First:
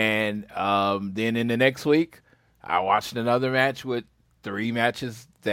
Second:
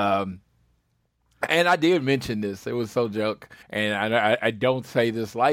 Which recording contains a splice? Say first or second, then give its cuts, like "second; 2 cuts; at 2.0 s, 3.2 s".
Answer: second; 1 cut; at 3.6 s